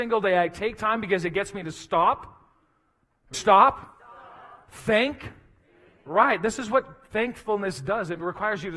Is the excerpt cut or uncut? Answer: cut